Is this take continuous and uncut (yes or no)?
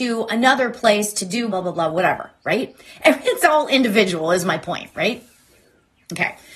no